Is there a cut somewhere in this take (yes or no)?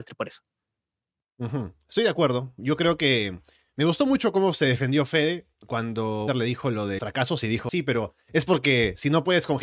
yes